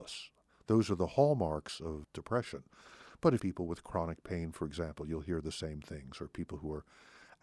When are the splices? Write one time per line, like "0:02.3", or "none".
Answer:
0:03.4